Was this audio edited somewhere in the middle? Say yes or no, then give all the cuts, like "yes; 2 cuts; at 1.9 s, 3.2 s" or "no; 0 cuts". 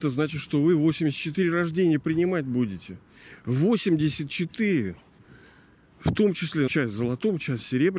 yes; 1 cut; at 6.7 s